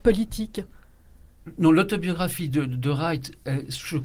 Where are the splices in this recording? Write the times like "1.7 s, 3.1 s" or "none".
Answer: none